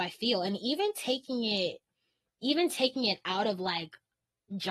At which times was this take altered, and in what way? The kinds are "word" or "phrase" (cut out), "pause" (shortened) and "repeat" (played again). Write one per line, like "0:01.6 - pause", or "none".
none